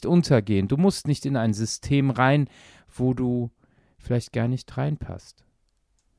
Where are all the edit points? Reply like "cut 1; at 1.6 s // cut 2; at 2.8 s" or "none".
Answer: none